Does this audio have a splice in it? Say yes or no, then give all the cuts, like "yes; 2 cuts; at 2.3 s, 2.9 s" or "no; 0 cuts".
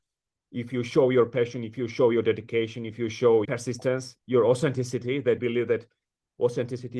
yes; 3 cuts; at 3.4 s, 4.2 s, 5.4 s